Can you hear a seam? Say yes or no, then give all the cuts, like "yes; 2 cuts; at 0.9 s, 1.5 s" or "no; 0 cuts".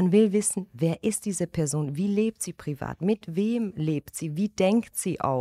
no; 0 cuts